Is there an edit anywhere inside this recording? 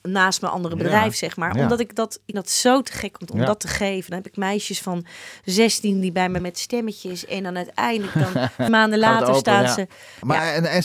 yes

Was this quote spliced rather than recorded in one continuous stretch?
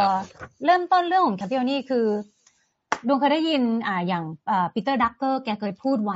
yes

